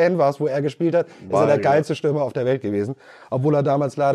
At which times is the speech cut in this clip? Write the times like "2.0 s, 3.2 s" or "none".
none